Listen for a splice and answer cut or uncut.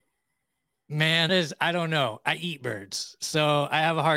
cut